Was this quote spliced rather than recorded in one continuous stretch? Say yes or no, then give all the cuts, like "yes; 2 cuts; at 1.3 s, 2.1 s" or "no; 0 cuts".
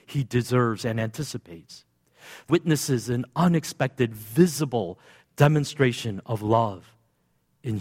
yes; 1 cut; at 2.5 s